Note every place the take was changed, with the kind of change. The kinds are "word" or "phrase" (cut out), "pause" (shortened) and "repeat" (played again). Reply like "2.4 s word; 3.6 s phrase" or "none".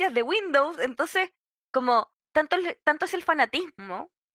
none